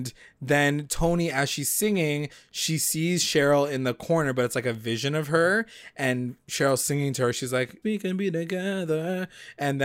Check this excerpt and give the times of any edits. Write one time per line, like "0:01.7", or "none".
0:07.8